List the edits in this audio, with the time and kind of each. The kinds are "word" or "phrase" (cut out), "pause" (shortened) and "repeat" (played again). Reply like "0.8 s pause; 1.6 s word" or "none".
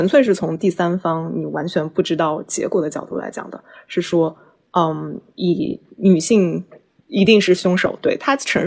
none